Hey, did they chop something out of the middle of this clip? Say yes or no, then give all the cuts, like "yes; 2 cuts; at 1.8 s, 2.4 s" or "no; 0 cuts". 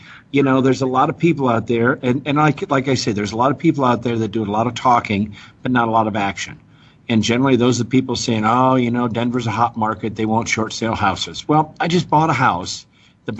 no; 0 cuts